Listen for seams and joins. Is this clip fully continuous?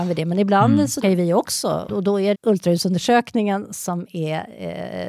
no; 3 cuts; at 1.0 s, 1.9 s, 2.3 s

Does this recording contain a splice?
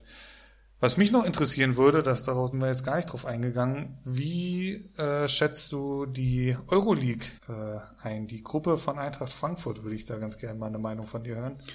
yes; 2 cuts; at 2.5 s, 7.4 s

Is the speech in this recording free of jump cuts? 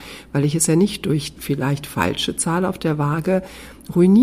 no; 1 cut; at 1.4 s

